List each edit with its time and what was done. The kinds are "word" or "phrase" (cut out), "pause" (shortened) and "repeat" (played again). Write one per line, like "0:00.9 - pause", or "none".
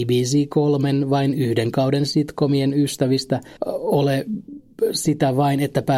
0:03.6 - pause